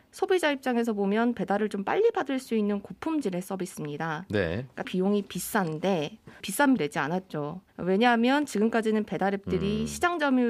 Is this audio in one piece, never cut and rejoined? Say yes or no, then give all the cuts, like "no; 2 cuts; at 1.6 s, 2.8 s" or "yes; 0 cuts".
no; 4 cuts; at 4.8 s, 6.4 s, 6.8 s, 7.7 s